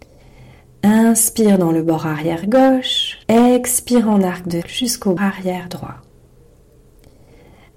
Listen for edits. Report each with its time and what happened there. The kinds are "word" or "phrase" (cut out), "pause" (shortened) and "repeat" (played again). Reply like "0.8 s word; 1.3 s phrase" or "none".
3.2 s pause; 4.6 s word; 5.2 s word